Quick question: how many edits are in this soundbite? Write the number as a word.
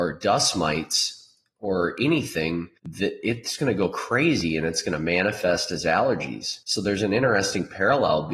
two